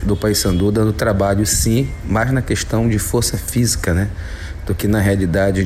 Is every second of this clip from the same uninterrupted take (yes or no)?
yes